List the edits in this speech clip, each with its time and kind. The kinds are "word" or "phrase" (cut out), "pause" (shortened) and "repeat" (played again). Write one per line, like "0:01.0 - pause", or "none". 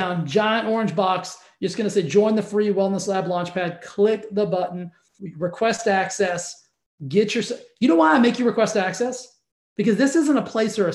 none